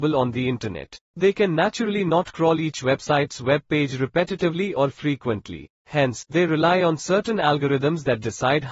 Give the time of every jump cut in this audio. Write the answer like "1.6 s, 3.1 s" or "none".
1.0 s, 5.8 s